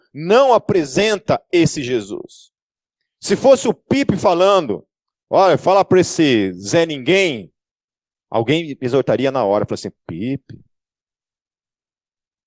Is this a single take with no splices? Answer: yes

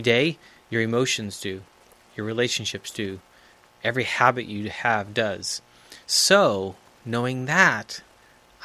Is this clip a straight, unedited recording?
yes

